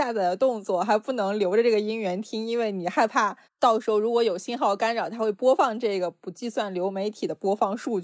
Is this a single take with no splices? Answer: no; 1 cut; at 3.4 s

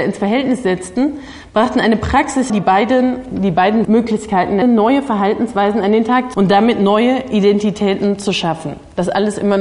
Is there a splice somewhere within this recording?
yes; 4 cuts; at 2.5 s, 3.8 s, 4.6 s, 6.3 s

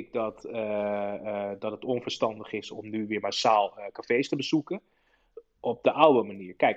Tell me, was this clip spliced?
no; 0 cuts

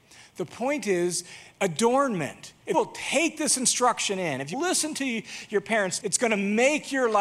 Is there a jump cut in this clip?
yes; 3 cuts; at 2.7 s, 4.5 s, 6.0 s

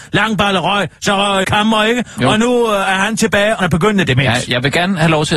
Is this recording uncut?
no; 2 cuts; at 1.4 s, 3.6 s

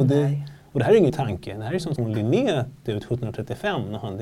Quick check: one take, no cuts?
no; 3 cuts; at 1.1 s, 2.0 s, 2.8 s

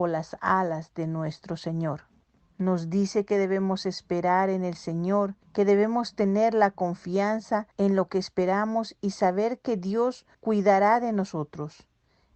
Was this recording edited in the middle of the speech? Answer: yes; 4 cuts; at 2.4 s, 5.4 s, 7.7 s, 10.3 s

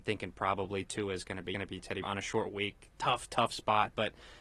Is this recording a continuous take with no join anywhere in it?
no; 2 cuts; at 1.5 s, 2.0 s

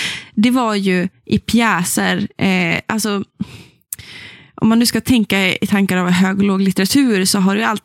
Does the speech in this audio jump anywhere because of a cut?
no; 0 cuts

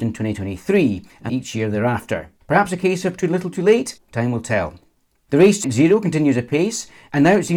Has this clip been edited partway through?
yes; 3 cuts; at 1.3 s, 2.4 s, 5.6 s

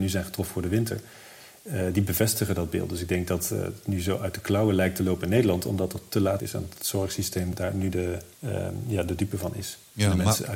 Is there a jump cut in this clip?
yes; 3 cuts; at 6.4 s, 7.5 s, 8.3 s

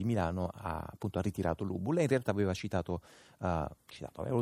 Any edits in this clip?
no; 0 cuts

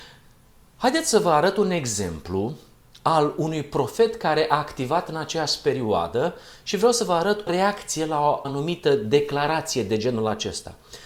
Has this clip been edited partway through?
yes; 2 cuts; at 7.5 s, 8.4 s

